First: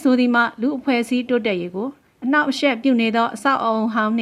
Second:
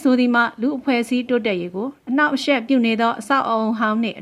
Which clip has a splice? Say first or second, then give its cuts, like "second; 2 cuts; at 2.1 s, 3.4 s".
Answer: second; 1 cut; at 2.0 s